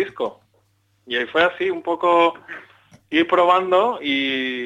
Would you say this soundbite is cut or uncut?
uncut